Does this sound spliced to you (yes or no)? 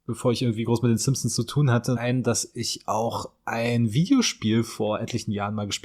yes